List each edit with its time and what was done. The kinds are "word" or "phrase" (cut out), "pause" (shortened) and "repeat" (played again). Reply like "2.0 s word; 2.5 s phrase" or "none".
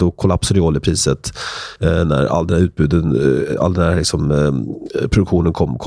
none